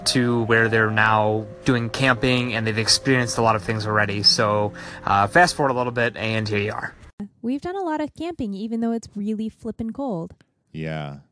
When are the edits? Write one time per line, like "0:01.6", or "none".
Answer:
none